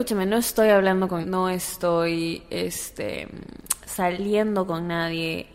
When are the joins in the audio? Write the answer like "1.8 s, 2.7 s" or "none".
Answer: 1.2 s